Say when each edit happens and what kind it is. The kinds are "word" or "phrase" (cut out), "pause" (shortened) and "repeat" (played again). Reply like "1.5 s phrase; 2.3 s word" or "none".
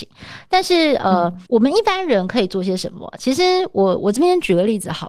1.5 s pause